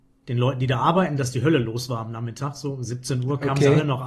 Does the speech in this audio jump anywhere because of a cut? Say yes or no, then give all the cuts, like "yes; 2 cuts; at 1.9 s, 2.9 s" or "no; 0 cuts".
no; 0 cuts